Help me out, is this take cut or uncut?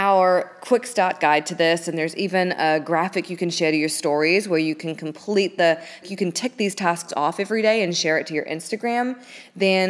cut